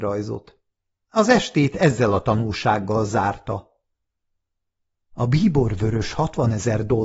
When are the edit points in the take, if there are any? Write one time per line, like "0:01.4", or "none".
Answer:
none